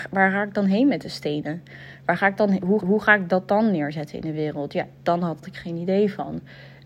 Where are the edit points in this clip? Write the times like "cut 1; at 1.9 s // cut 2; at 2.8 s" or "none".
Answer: cut 1; at 2.8 s // cut 2; at 5.4 s

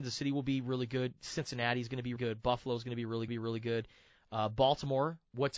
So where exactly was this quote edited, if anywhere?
cut 1; at 2.2 s // cut 2; at 3.3 s

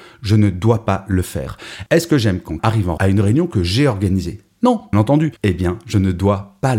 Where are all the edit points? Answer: cut 1; at 2.6 s // cut 2; at 3.0 s // cut 3; at 4.9 s // cut 4; at 5.4 s

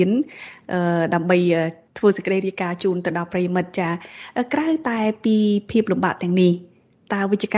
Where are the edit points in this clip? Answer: none

